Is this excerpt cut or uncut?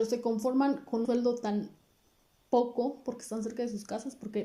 cut